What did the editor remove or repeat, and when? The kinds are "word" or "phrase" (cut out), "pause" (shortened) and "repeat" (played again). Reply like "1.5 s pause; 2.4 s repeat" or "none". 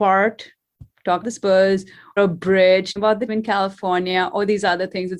1.2 s word; 2.2 s word; 3.0 s word; 3.3 s word